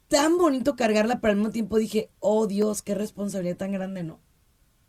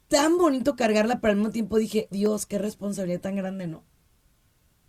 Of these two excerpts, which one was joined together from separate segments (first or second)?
second